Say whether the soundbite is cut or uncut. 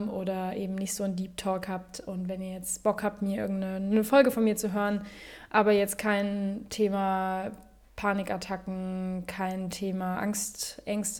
uncut